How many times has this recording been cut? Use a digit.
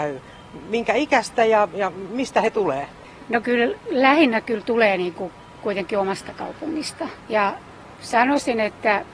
1